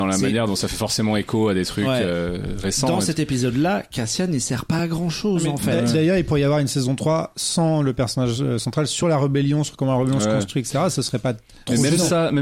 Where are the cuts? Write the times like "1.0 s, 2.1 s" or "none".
none